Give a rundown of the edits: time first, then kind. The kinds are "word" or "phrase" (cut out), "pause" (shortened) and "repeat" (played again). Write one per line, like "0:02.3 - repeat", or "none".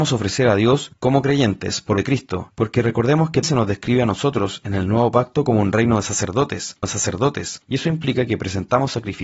0:02.0 - word
0:03.4 - word
0:06.8 - repeat